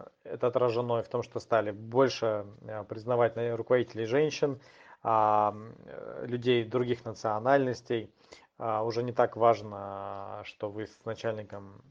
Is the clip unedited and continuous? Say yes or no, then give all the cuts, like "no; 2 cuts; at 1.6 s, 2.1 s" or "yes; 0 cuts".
yes; 0 cuts